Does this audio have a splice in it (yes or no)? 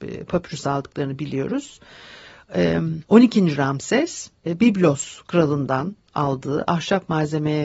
yes